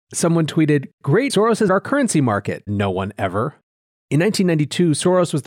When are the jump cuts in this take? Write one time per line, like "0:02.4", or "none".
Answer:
0:01.3
0:01.7
0:02.7